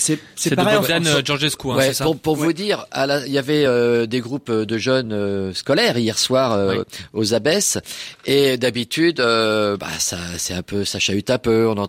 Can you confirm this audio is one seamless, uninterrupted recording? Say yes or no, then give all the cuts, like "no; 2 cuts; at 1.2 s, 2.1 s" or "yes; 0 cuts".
yes; 0 cuts